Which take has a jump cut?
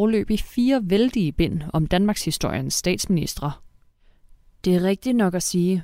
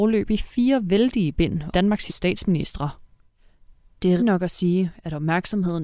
second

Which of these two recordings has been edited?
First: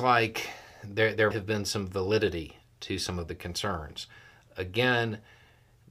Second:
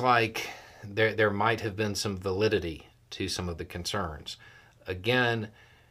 first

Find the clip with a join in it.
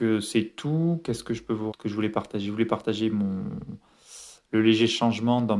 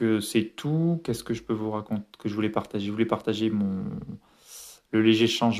first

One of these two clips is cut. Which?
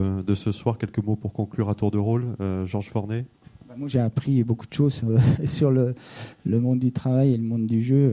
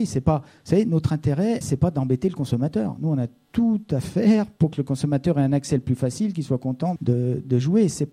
second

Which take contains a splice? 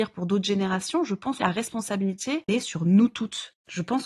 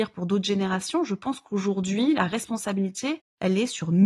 first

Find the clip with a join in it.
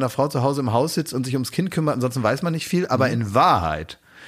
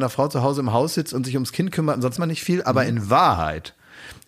second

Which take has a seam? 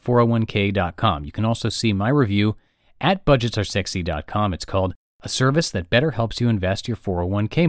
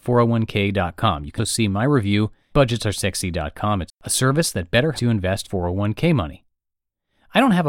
second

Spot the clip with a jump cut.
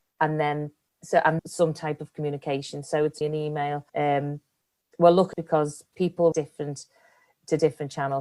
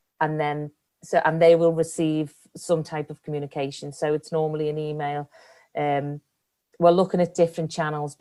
first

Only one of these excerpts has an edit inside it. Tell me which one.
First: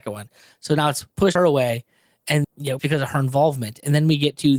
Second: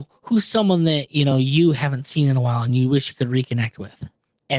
first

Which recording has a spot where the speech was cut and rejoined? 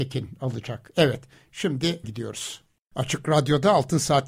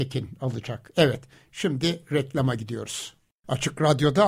first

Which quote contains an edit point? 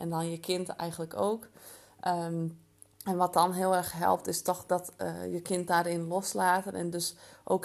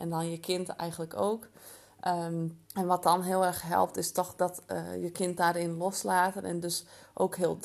second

